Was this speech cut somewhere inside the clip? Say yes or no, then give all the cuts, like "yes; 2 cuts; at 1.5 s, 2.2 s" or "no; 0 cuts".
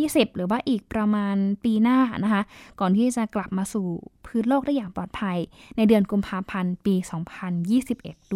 no; 0 cuts